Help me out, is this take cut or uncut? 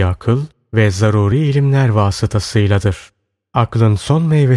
uncut